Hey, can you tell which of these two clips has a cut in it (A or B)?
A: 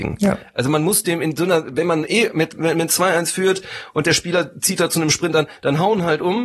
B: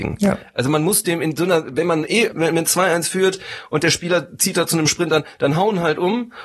B